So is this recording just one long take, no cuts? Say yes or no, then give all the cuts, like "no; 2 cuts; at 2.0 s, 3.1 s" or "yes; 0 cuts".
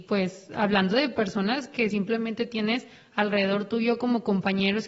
yes; 0 cuts